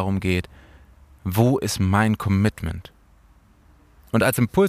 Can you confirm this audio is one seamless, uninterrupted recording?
yes; 0 cuts

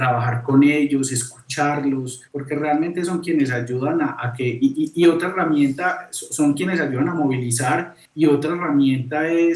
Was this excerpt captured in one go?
no; 2 cuts; at 2.3 s, 8.1 s

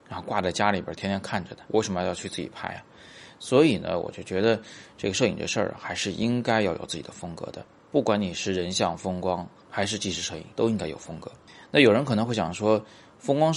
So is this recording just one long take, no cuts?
no; 3 cuts; at 1.7 s, 10.5 s, 11.5 s

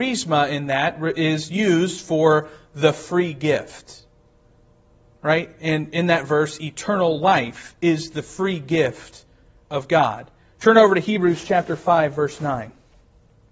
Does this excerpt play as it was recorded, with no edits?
yes; 0 cuts

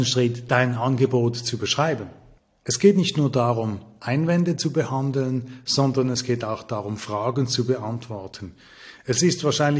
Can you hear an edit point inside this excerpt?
no; 0 cuts

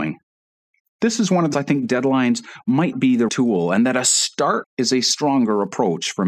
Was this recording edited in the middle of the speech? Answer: yes; 4 cuts; at 1.5 s, 2.9 s, 3.3 s, 4.6 s

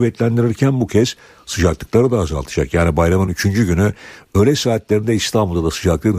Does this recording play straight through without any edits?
yes; 0 cuts

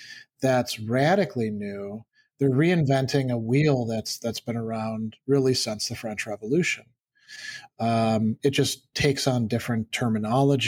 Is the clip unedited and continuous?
yes; 0 cuts

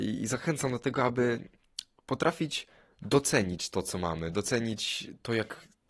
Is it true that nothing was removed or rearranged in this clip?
yes; 0 cuts

